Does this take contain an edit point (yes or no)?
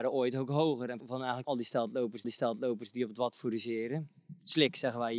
yes